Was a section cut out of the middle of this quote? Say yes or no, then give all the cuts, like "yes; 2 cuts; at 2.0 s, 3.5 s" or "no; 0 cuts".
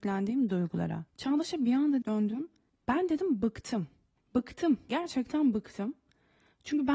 yes; 3 cuts; at 1.1 s, 2.0 s, 4.9 s